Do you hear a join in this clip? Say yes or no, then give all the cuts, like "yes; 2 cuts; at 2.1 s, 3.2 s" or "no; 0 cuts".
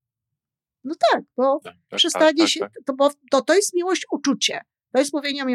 no; 0 cuts